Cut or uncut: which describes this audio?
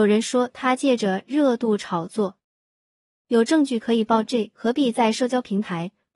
uncut